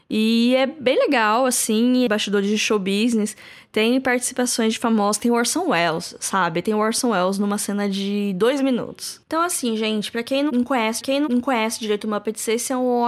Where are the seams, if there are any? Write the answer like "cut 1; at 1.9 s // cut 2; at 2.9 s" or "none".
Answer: cut 1; at 2.1 s // cut 2; at 9.2 s // cut 3; at 11.0 s